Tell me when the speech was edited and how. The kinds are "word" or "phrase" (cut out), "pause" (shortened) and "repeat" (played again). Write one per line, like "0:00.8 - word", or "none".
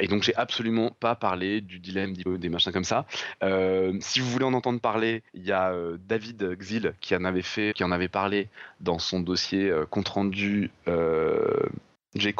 0:02.3 - word
0:05.3 - pause
0:07.7 - word